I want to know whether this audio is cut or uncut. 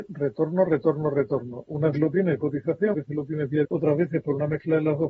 cut